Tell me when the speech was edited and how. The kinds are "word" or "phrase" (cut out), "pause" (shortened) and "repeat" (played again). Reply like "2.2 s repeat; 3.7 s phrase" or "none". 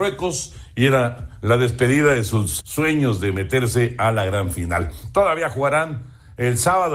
2.6 s word